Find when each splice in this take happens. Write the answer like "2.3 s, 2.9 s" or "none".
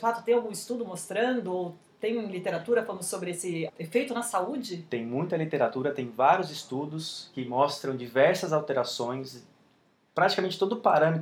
3.7 s